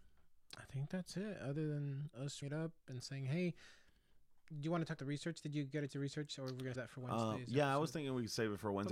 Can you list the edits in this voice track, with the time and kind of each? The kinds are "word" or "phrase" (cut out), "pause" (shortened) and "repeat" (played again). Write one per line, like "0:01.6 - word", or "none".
0:02.4 - word
0:04.4 - word
0:05.0 - word
0:05.9 - word
0:06.7 - word